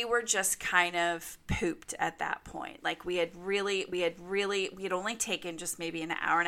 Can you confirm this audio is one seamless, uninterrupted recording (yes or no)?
no